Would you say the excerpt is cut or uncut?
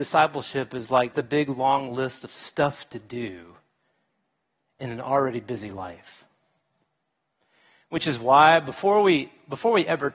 cut